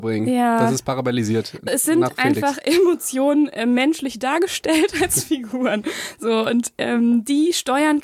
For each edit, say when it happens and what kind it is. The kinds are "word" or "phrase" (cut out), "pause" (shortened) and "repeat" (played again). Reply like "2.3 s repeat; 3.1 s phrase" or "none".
1.7 s word

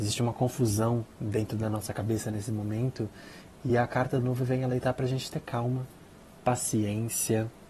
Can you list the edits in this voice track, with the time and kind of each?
none

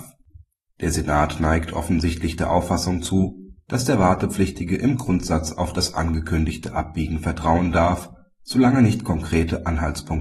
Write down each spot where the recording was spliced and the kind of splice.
none

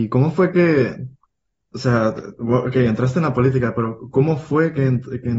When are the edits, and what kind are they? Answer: none

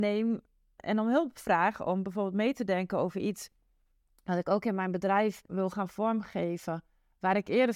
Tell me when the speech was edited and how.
none

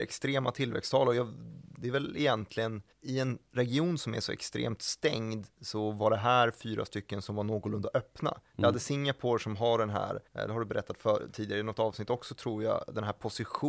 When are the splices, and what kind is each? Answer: 2.9 s pause; 5.5 s pause; 10.3 s pause

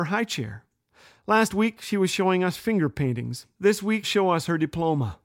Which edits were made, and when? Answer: 4.0 s word

